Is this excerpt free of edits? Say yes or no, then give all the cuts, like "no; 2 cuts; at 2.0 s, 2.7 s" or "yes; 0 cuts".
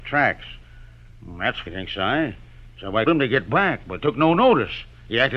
no; 3 cuts; at 1.7 s, 3.1 s, 4.0 s